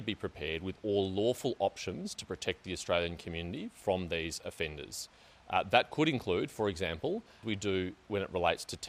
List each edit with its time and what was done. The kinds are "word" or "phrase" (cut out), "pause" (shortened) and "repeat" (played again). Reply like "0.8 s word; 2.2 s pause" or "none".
7.4 s word